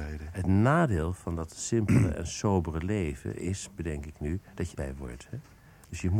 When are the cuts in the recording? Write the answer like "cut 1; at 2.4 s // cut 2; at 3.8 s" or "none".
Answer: cut 1; at 4.7 s